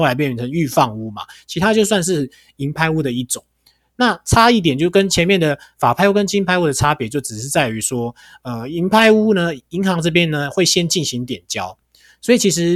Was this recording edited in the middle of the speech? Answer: no; 0 cuts

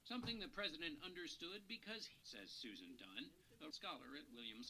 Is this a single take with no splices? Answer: no; 2 cuts; at 2.2 s, 3.7 s

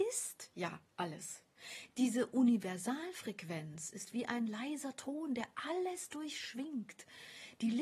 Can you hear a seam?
no; 0 cuts

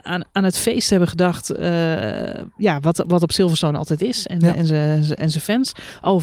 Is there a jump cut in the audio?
no; 0 cuts

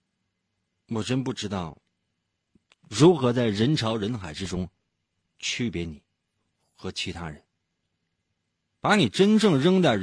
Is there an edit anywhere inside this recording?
no; 0 cuts

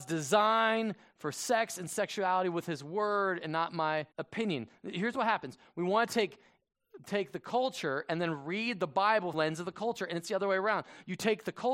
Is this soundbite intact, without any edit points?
no; 2 cuts; at 4.1 s, 9.3 s

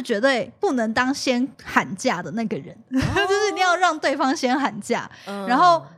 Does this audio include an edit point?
no; 0 cuts

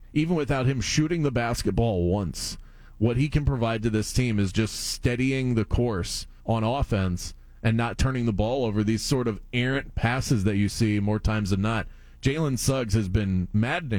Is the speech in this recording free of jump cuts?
no; 1 cut; at 6.4 s

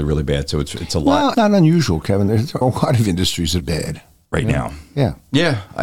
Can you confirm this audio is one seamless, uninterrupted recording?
no; 3 cuts; at 1.3 s, 2.6 s, 3.6 s

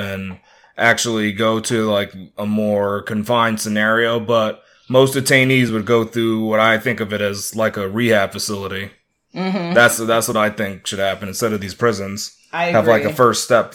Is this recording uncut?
yes; 0 cuts

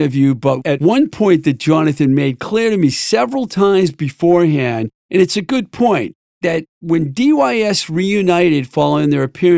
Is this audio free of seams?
yes; 0 cuts

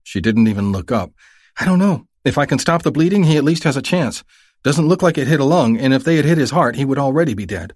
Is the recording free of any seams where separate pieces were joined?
yes; 0 cuts

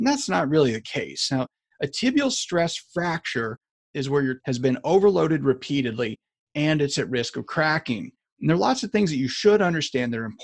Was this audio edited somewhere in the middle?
yes; 1 cut; at 4.4 s

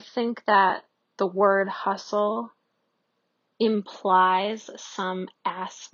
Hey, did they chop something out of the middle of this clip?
no; 0 cuts

